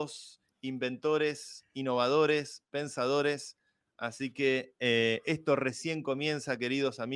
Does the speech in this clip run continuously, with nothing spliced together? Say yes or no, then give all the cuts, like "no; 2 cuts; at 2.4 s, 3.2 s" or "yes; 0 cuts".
yes; 0 cuts